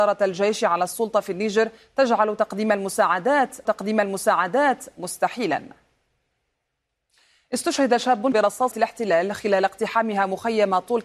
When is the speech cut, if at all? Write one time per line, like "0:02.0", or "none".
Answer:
0:03.7
0:08.3
0:08.7